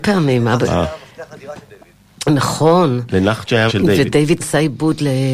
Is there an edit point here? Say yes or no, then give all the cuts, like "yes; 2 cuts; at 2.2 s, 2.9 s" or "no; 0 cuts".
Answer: yes; 2 cuts; at 3.7 s, 4.4 s